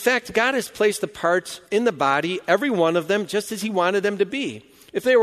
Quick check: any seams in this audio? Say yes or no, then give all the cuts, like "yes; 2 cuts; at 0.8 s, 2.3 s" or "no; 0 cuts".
yes; 1 cut; at 1.7 s